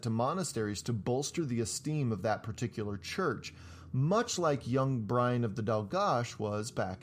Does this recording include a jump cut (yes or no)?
no